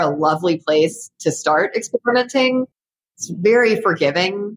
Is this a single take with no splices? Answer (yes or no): yes